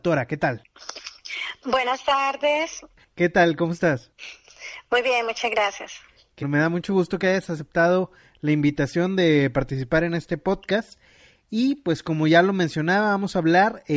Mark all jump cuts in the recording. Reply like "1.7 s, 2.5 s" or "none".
6.4 s